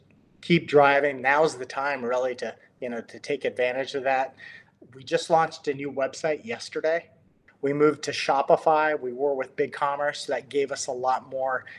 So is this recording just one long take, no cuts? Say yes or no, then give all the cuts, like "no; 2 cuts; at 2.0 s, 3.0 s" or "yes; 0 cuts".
yes; 0 cuts